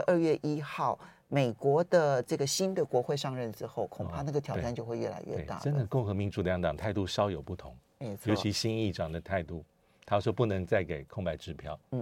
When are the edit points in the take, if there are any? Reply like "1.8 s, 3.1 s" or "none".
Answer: none